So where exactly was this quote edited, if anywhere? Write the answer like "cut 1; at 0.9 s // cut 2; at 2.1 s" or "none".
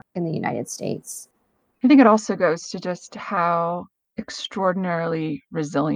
none

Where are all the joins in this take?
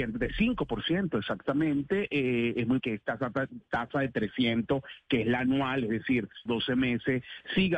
cut 1; at 2.8 s // cut 2; at 6.5 s

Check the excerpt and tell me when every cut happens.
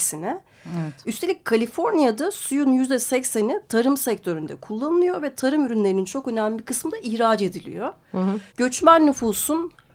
cut 1; at 8.5 s

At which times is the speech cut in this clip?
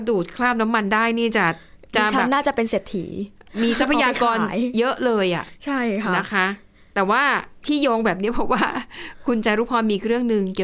none

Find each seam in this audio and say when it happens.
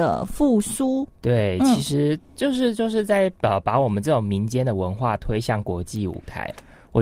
cut 1; at 3.4 s

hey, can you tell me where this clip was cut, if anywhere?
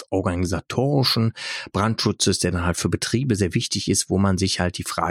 cut 1; at 3.4 s

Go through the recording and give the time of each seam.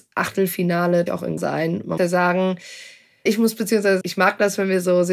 cut 1; at 1.1 s // cut 2; at 1.4 s // cut 3; at 2.0 s // cut 4; at 3.3 s // cut 5; at 4.0 s

